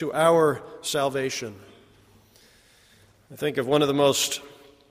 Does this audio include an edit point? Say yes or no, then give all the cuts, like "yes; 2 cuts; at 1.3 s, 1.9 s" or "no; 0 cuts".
no; 0 cuts